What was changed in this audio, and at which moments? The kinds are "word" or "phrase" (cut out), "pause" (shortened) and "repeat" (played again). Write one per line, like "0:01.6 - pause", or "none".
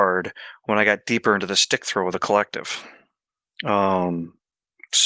none